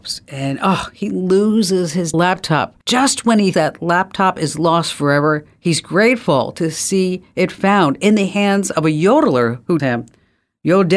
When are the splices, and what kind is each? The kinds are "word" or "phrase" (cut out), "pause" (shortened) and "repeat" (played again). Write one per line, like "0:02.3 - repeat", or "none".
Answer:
0:02.1 - word
0:02.8 - pause
0:03.5 - word
0:09.8 - word